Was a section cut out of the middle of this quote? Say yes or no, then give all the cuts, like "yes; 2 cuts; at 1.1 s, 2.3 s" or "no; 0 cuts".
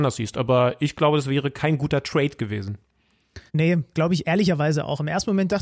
yes; 1 cut; at 3.5 s